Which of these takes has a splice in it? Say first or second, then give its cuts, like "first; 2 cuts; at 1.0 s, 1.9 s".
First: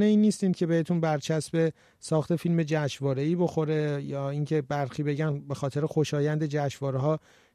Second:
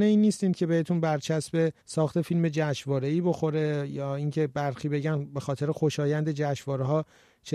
second; 1 cut; at 1.8 s